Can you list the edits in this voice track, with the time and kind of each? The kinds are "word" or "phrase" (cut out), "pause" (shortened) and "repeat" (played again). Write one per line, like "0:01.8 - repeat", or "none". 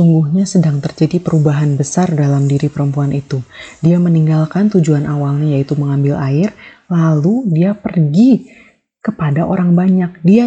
none